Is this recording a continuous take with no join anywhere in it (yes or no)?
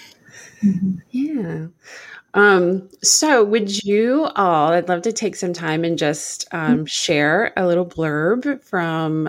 no